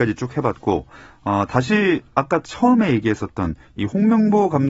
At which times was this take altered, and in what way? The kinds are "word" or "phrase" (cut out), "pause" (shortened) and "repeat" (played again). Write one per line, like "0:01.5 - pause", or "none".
none